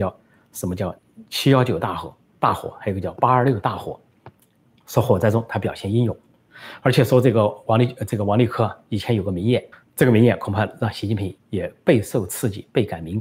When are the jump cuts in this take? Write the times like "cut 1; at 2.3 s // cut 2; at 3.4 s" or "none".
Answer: cut 1; at 1.0 s // cut 2; at 4.3 s // cut 3; at 9.7 s // cut 4; at 11.4 s